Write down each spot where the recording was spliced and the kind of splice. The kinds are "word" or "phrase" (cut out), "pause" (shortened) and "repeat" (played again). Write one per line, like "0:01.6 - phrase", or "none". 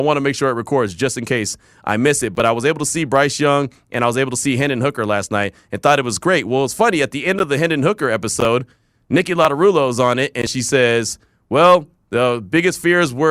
none